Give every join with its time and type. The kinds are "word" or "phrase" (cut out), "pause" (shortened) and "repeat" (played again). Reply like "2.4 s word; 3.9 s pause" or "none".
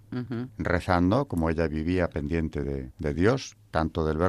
none